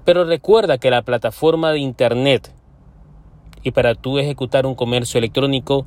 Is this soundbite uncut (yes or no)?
yes